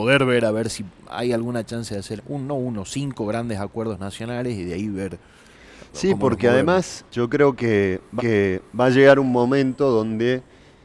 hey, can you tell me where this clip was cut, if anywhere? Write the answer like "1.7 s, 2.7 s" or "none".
2.2 s, 7.1 s, 8.2 s